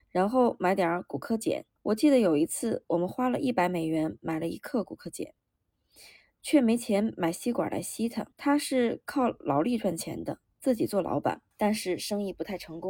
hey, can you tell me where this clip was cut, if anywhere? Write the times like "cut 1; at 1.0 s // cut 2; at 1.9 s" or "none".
cut 1; at 1.8 s // cut 2; at 8.3 s // cut 3; at 11.5 s